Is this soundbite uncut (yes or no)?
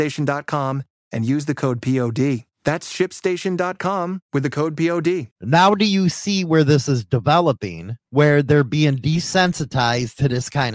no